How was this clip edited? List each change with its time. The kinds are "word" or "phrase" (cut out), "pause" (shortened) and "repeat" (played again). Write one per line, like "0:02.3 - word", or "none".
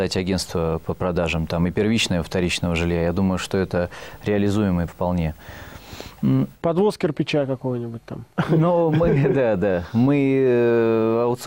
0:04.9 - phrase